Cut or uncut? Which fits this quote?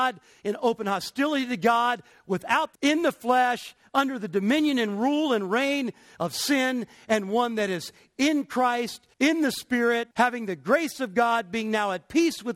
cut